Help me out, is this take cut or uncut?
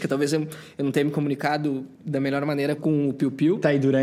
cut